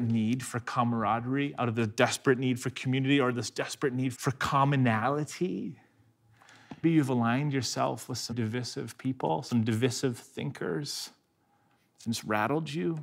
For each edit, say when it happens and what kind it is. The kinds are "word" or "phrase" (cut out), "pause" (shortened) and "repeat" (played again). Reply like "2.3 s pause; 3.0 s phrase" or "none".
4.1 s word; 6.8 s word; 8.3 s word